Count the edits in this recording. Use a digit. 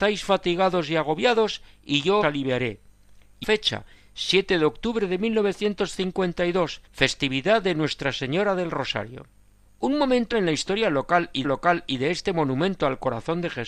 6